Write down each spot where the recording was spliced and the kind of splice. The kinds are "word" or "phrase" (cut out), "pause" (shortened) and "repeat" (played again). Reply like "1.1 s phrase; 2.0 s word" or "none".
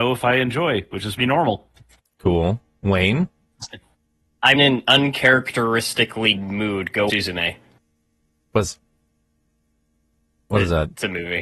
1.2 s word; 4.6 s word; 6.4 s word; 7.1 s word; 8.8 s word

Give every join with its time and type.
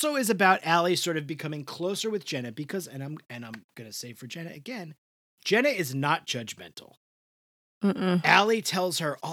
none

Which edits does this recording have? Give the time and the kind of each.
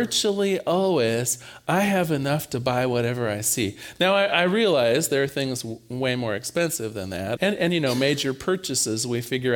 7.4 s word

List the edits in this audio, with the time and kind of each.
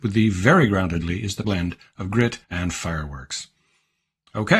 1.0 s word; 1.4 s word; 2.4 s pause

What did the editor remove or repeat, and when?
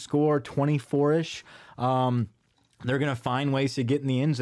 none

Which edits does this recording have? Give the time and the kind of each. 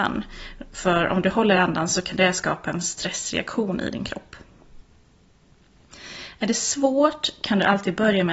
none

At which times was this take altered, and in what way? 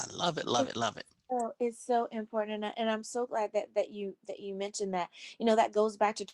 none

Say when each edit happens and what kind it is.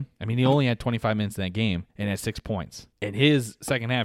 1.9 s pause; 2.9 s pause

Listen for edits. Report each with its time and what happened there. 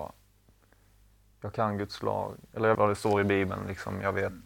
2.7 s word

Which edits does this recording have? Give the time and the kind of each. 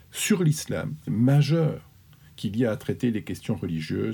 1.1 s word

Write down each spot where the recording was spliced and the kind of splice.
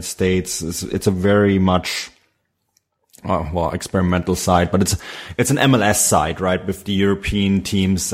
none

